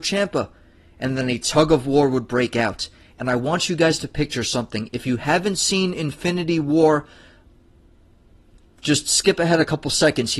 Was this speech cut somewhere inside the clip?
no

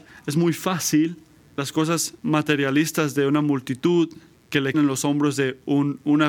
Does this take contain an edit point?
yes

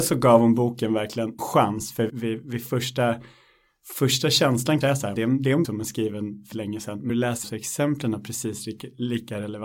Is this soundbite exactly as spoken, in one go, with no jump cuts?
no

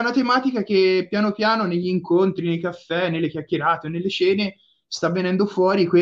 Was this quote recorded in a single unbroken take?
yes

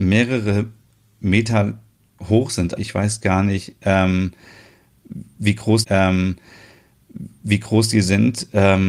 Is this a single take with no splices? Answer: no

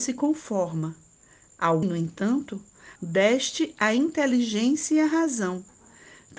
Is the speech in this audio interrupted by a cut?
yes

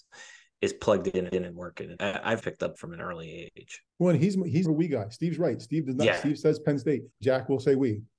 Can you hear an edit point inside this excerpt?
yes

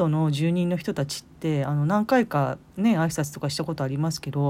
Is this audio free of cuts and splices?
yes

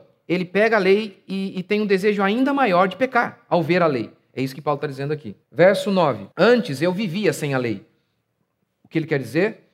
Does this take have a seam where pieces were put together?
yes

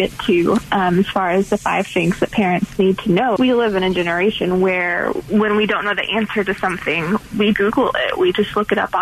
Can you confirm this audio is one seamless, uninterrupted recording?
no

